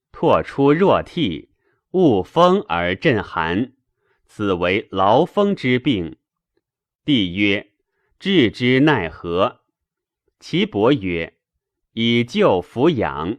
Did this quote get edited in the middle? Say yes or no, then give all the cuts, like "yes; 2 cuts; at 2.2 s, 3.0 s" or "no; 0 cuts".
no; 0 cuts